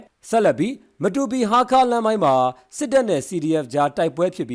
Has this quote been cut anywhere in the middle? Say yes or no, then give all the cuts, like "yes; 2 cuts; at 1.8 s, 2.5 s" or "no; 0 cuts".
no; 0 cuts